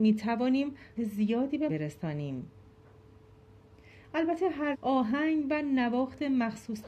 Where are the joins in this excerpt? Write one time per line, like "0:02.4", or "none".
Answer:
0:01.0
0:01.7
0:04.7